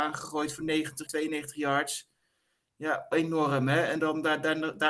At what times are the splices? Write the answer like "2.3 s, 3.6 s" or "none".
1.1 s, 3.1 s